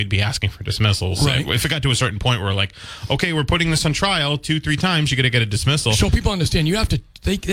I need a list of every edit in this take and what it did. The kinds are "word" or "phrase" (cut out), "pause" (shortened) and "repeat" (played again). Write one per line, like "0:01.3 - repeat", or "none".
none